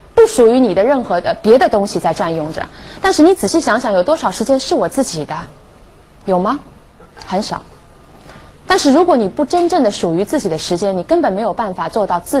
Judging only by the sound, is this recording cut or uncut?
uncut